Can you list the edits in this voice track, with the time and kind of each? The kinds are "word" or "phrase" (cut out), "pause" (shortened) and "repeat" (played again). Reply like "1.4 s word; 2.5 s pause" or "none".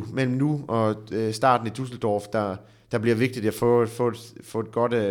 none